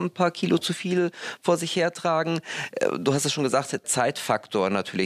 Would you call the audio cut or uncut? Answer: cut